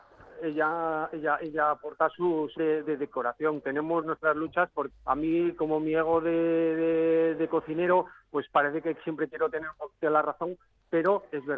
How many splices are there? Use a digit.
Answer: 3